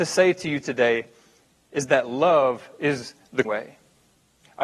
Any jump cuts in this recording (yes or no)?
yes